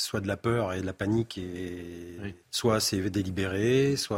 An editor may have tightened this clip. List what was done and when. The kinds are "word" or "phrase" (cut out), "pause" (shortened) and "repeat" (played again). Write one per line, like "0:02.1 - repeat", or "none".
0:02.4 - pause